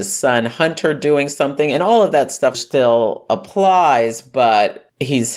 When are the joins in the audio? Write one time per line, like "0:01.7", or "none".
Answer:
0:02.5